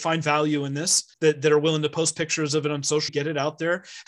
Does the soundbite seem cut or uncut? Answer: cut